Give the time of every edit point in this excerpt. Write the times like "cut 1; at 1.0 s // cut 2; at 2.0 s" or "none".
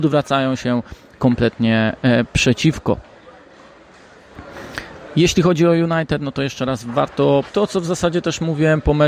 cut 1; at 7.5 s

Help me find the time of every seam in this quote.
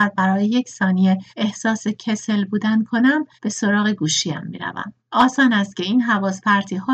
cut 1; at 1.3 s // cut 2; at 3.3 s // cut 3; at 5.0 s

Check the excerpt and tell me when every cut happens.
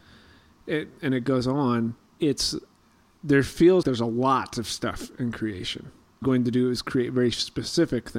cut 1; at 2.0 s // cut 2; at 3.8 s // cut 3; at 6.2 s

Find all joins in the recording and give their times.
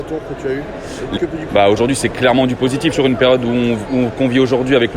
cut 1; at 1.2 s // cut 2; at 1.5 s // cut 3; at 2.9 s

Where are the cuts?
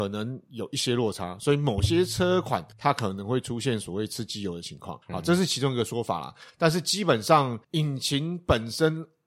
cut 1; at 2.7 s // cut 2; at 5.0 s // cut 3; at 7.6 s

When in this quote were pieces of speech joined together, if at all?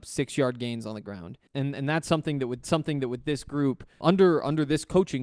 cut 1; at 1.5 s // cut 2; at 2.6 s // cut 3; at 4.0 s

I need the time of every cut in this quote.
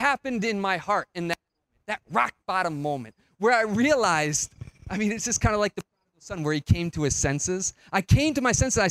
none

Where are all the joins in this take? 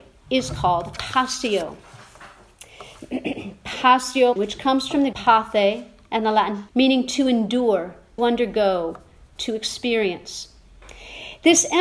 cut 1; at 1.0 s // cut 2; at 4.4 s // cut 3; at 5.1 s // cut 4; at 6.7 s // cut 5; at 8.2 s

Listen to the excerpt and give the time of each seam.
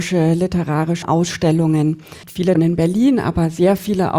cut 1; at 1.0 s // cut 2; at 2.5 s

